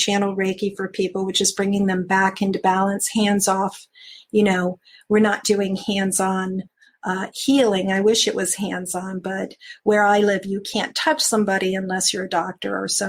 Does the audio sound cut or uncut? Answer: uncut